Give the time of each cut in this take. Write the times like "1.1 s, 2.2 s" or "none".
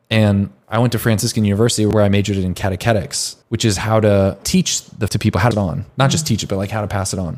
3.4 s, 5.1 s, 5.5 s

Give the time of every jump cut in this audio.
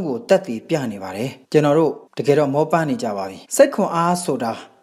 1.4 s, 2.1 s, 3.4 s

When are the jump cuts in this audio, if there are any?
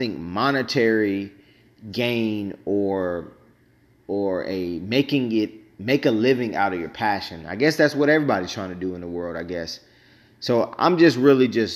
none

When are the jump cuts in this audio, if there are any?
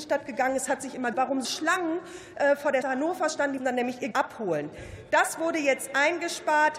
1.1 s, 1.4 s, 2.8 s, 3.6 s, 4.1 s

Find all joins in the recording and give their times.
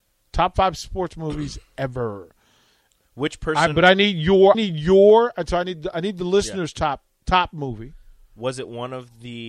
4.5 s

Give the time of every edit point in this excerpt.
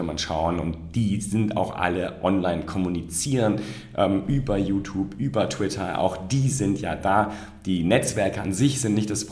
none

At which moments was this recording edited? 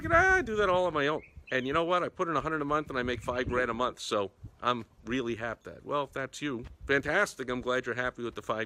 4.5 s, 5.6 s

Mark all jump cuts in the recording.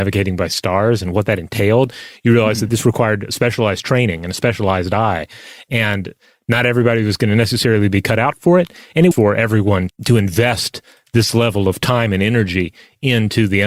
9.1 s, 9.9 s

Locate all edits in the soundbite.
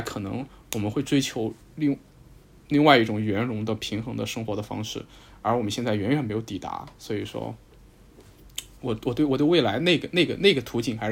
none

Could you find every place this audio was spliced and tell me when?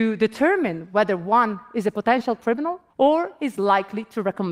2.9 s

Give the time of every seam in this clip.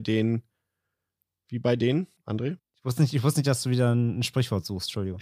2.2 s

